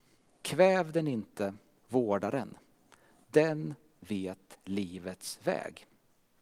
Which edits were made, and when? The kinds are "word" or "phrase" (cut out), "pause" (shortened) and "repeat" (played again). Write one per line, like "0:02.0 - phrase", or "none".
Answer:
none